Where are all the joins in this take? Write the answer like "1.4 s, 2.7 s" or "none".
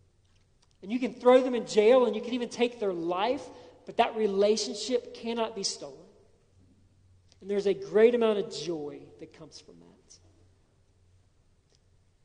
none